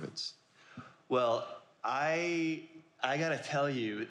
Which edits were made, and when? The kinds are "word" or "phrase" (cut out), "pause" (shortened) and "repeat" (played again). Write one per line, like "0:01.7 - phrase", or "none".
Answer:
none